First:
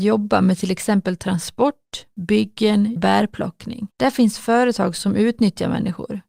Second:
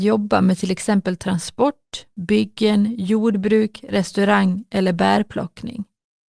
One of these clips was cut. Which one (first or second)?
first